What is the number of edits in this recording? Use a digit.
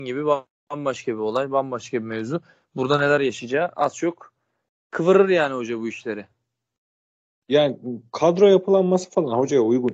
0